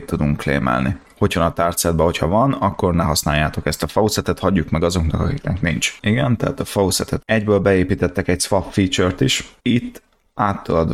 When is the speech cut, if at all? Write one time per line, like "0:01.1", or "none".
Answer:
0:01.4
0:07.2
0:09.6